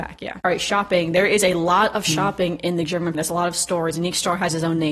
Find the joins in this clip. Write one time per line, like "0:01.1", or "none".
0:03.1